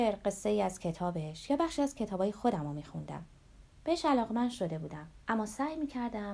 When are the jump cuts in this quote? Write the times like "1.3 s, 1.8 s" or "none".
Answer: 5.2 s